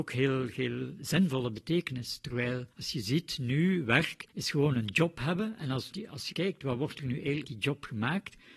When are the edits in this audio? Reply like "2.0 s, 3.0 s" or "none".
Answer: 2.7 s, 4.3 s, 5.9 s, 6.3 s, 7.4 s

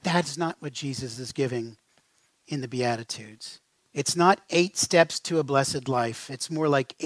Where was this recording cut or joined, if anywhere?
none

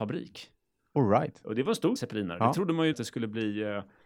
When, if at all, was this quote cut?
2.0 s, 2.9 s

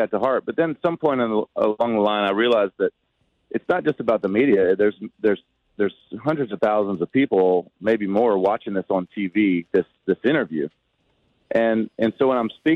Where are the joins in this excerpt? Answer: none

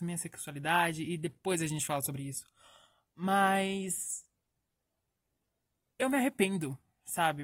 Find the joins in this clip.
none

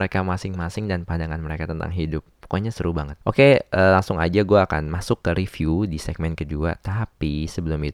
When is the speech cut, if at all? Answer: 3.2 s

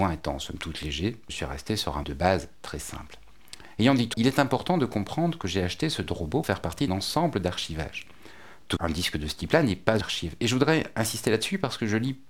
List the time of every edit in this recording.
1.3 s, 2.0 s, 4.1 s, 6.4 s, 6.9 s, 8.8 s, 10.0 s

